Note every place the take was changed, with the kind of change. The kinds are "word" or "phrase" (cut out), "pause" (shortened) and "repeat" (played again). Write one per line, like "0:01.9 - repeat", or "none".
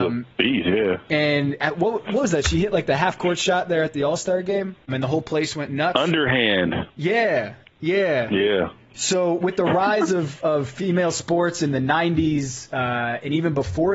none

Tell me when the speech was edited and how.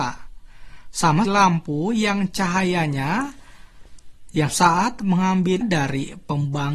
0:01.2 - word
0:04.5 - word
0:05.6 - word

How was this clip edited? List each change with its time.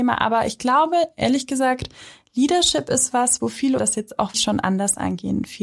0:03.8 - word
0:04.3 - word

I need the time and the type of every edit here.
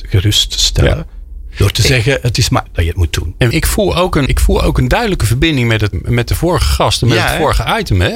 0:02.7 - word
0:03.5 - word
0:04.3 - word
0:05.9 - word

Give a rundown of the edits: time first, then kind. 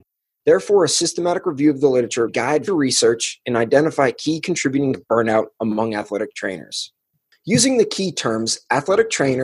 0:02.3 - word
0:02.7 - word
0:04.9 - word

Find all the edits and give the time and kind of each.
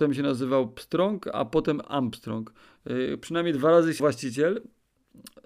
0:04.0 - word

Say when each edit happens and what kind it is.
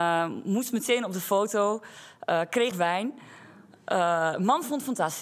0:02.7 - word

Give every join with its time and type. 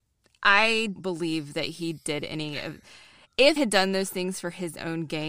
0:01.0 - word
0:03.6 - word

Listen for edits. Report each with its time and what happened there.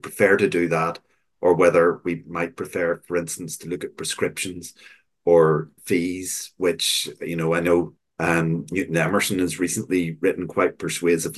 0:05.8 - word
0:08.0 - pause

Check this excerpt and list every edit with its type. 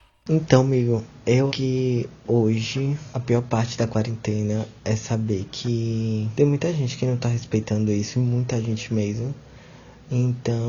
0:01.5 - word

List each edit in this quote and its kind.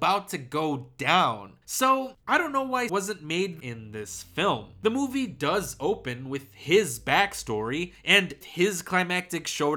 0:01.6 - pause
0:02.9 - word
0:03.6 - phrase
0:08.4 - phrase

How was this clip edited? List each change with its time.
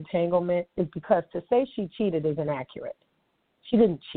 none

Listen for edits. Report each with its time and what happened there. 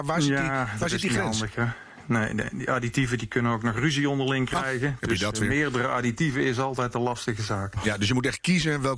none

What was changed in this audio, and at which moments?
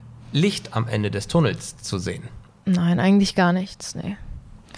0:02.5 - pause

